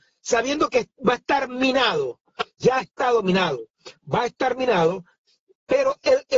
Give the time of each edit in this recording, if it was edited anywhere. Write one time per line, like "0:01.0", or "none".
none